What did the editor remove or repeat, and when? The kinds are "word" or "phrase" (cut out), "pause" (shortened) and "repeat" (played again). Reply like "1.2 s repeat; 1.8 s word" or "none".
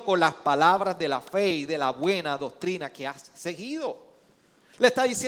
none